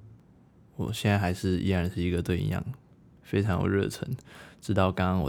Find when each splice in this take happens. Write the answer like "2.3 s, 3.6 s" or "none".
none